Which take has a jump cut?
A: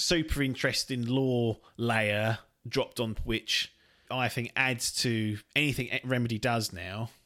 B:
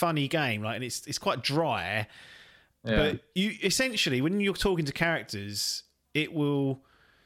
A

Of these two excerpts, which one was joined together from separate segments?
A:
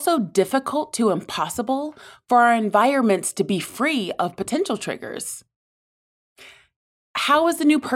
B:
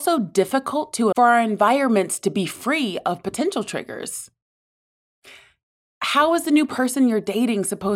B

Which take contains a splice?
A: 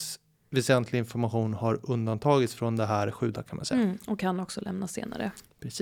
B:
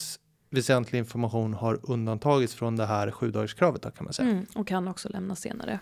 A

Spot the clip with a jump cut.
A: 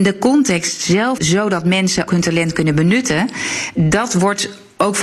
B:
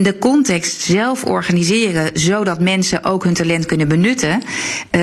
A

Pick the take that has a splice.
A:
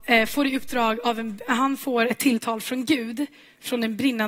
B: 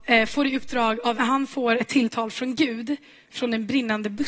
B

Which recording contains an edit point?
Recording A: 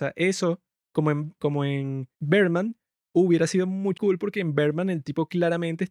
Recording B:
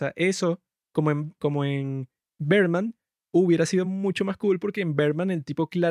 A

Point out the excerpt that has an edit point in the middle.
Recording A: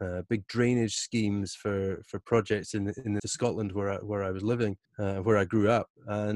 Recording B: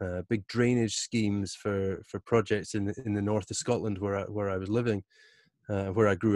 A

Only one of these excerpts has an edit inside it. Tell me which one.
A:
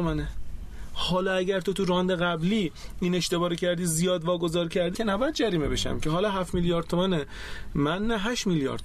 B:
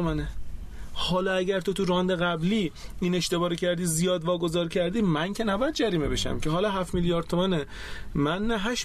A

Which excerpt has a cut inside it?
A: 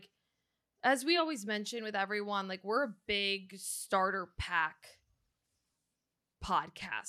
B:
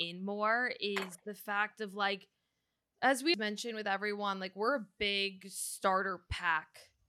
B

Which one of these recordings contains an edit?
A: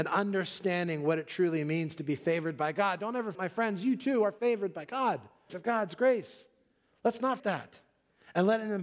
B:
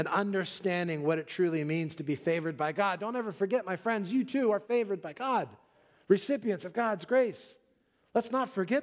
A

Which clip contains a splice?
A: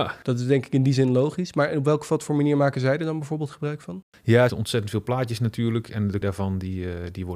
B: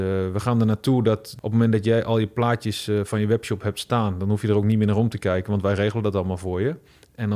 A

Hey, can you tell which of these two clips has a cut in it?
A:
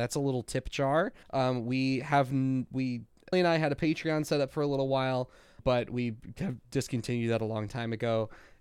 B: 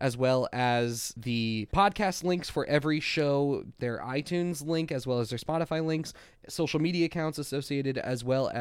A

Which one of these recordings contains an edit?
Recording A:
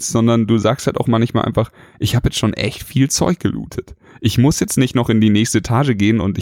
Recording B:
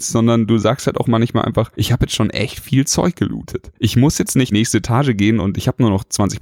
B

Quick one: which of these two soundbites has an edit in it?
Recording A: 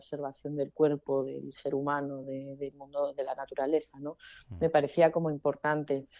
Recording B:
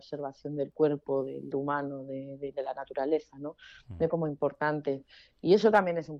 B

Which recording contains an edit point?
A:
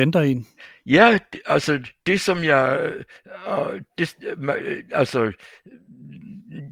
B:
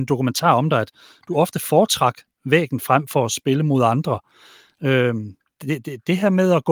B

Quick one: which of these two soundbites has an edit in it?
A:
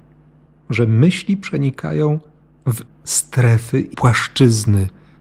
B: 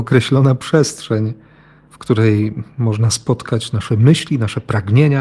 A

